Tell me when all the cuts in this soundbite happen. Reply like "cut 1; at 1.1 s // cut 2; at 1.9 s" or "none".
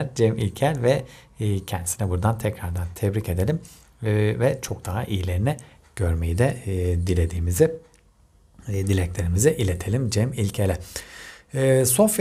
none